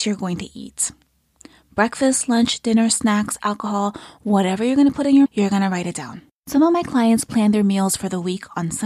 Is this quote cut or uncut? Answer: cut